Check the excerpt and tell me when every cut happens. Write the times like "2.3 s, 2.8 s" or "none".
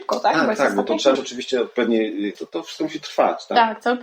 1.1 s, 2.3 s